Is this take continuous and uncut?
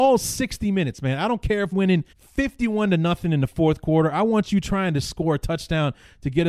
no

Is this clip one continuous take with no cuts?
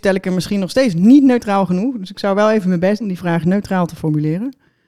no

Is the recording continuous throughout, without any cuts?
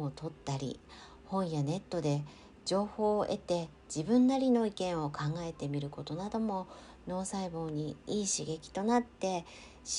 yes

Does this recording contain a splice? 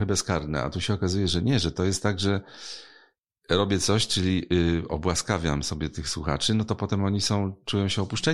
no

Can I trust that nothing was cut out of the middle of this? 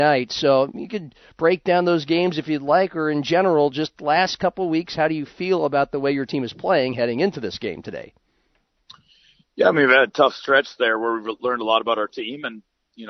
yes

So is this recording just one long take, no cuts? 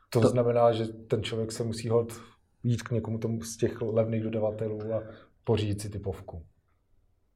yes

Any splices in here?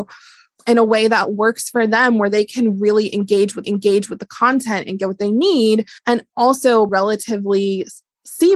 yes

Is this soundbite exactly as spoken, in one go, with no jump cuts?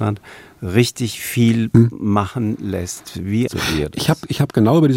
no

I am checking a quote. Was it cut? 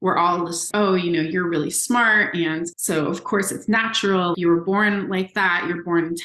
no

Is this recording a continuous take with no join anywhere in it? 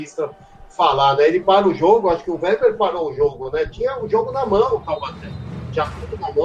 yes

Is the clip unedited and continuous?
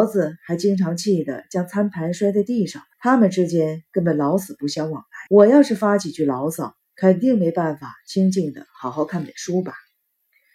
no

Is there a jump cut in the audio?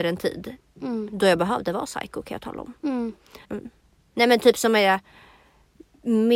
yes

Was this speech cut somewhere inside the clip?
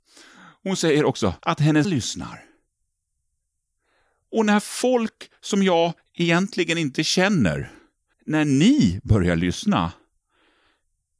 yes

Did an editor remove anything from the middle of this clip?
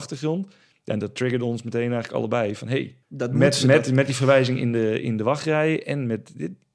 yes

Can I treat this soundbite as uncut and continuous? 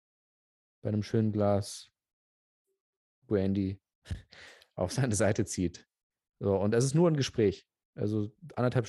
yes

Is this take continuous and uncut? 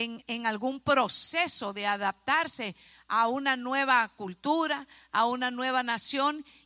yes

